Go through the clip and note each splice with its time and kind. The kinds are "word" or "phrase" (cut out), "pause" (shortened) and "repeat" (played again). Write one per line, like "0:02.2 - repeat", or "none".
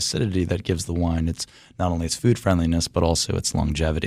none